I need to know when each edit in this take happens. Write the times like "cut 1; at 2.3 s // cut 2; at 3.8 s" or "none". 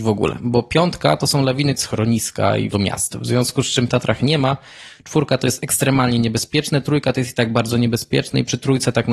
cut 1; at 1.8 s // cut 2; at 2.7 s // cut 3; at 3.9 s

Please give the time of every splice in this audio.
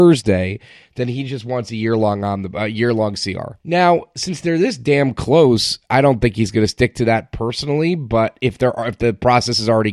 cut 1; at 3.6 s

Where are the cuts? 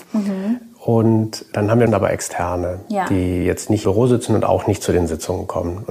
cut 1; at 1.5 s // cut 2; at 1.9 s // cut 3; at 3.8 s

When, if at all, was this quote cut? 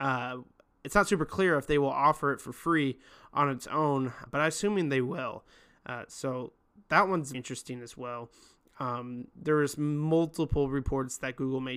cut 1; at 4.3 s // cut 2; at 7.3 s

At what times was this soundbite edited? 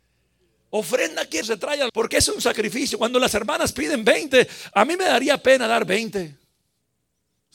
cut 1; at 1.4 s // cut 2; at 1.9 s

